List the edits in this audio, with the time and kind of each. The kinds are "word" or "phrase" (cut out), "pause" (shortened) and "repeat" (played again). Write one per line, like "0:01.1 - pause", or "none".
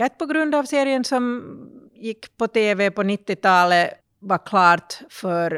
0:01.9 - pause
0:04.0 - pause